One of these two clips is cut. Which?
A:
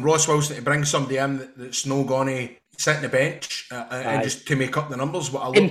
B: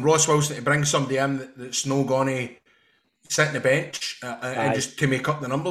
A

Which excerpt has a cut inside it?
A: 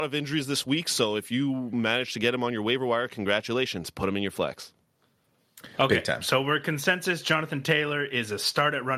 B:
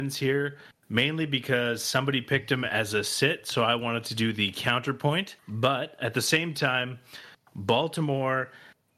B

